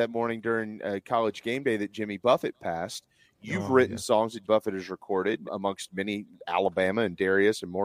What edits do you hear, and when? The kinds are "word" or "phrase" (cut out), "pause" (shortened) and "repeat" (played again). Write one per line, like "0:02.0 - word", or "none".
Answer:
0:04.4 - word
0:05.4 - word

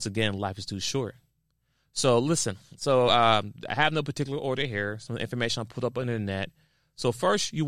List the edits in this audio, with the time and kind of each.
none

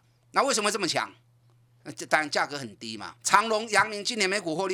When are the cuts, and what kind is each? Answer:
0:03.2 - pause

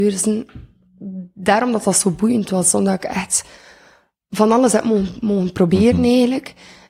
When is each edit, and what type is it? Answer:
none

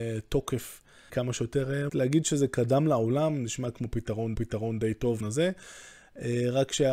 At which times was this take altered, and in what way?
0:01.1 - word
0:01.9 - word
0:04.3 - repeat
0:05.2 - phrase

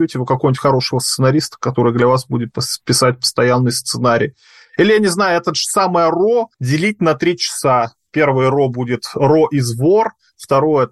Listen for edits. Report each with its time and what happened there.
0:06.5 - pause

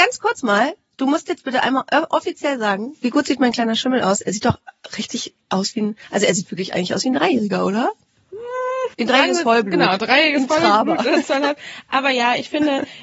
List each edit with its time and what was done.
0:08.9 - pause

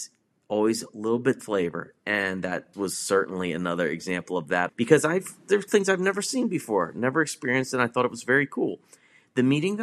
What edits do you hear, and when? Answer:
0:01.4 - word
0:02.7 - word
0:04.7 - word
0:05.7 - word

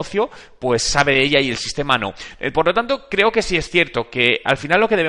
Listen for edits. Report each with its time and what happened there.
none

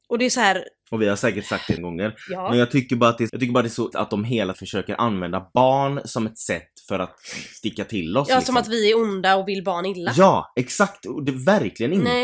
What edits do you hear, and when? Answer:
0:01.8 - word
0:03.3 - phrase
0:03.9 - word
0:04.5 - word

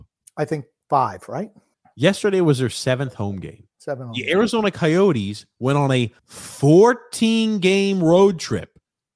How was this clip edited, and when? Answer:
0:01.7 - pause
0:06.2 - pause

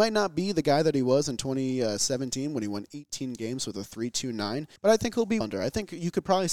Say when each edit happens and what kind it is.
0:04.8 - pause
0:05.4 - word

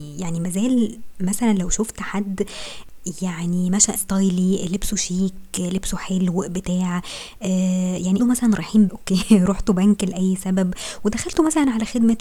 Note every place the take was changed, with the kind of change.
0:04.0 - word
0:08.2 - word
0:08.9 - word

